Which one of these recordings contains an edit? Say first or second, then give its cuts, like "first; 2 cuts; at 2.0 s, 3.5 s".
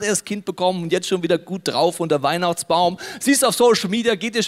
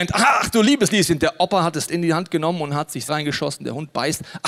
second; 2 cuts; at 1.9 s, 3.1 s